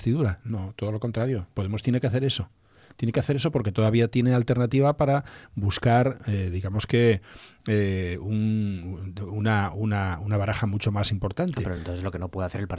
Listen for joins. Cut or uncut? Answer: uncut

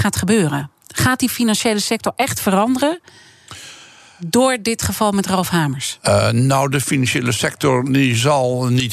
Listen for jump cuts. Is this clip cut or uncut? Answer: uncut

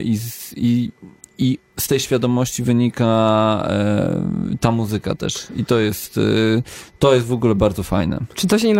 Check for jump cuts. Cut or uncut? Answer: uncut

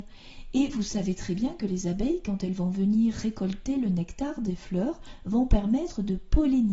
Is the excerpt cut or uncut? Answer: uncut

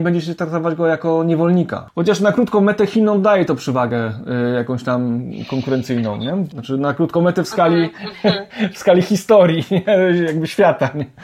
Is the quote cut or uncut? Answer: uncut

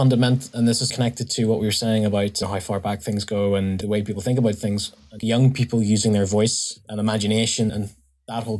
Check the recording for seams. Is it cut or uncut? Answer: cut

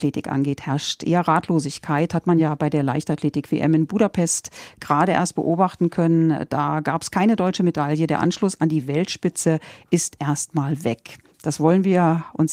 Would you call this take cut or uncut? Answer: uncut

